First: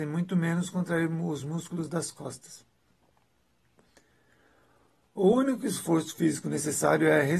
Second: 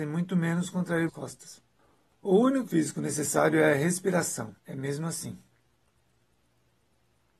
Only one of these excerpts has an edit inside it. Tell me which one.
second; 4 cuts; at 1.1 s, 1.8 s, 2.7 s, 4.6 s

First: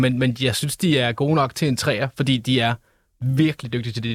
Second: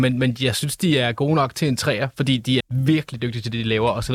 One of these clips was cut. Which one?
second; 1 cut; at 2.6 s

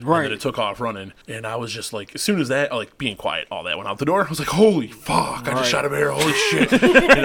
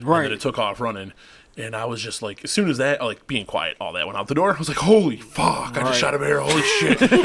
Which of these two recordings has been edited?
first; 1 cut; at 1.2 s

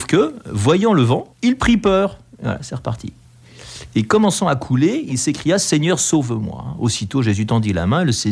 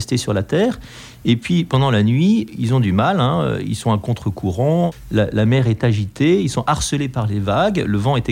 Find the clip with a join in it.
first; 1 cut; at 1.3 s

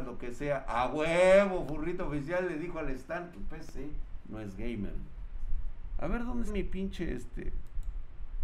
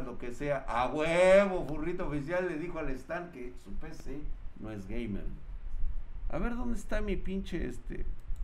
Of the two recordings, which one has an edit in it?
first; 2 cuts; at 3.3 s, 6.5 s

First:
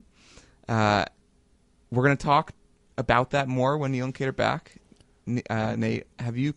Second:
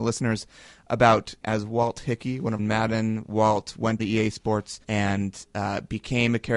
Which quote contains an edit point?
second; 4 cuts; at 1.4 s, 2.6 s, 4.0 s, 4.8 s

